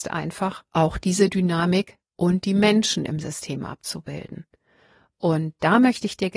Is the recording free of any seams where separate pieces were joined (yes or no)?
yes